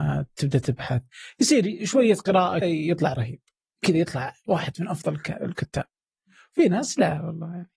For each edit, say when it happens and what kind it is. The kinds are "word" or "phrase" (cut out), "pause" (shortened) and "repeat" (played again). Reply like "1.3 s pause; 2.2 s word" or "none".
2.6 s word